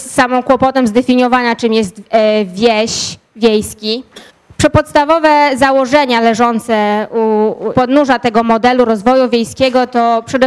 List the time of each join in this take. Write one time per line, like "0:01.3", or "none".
0:04.3
0:07.7